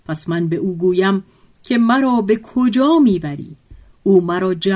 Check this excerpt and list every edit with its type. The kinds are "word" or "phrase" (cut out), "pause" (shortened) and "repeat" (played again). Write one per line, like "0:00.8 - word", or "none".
none